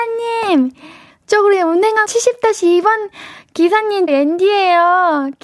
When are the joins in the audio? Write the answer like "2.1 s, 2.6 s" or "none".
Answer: 1.1 s, 2.1 s, 4.1 s